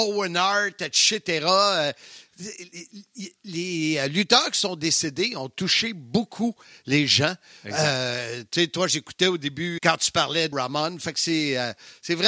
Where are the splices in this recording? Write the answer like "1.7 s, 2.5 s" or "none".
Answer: 9.8 s, 10.5 s